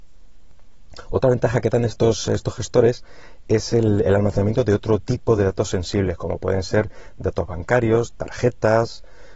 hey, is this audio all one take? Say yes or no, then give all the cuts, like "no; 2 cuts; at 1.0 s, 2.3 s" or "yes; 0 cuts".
yes; 0 cuts